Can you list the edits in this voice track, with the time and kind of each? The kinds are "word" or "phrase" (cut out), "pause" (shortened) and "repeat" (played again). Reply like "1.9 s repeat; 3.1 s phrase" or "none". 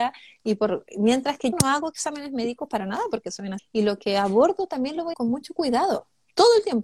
1.5 s word; 3.6 s word; 5.1 s word

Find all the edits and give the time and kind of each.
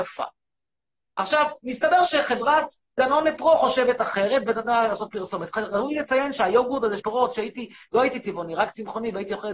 7.0 s phrase

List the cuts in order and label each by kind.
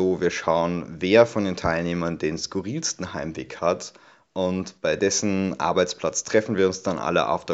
none

